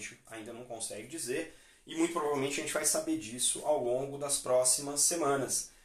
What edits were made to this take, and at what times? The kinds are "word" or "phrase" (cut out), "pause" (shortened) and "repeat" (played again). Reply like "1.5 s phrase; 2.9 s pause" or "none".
none